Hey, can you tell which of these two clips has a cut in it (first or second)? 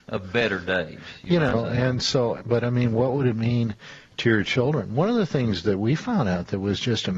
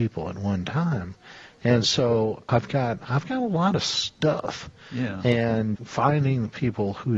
second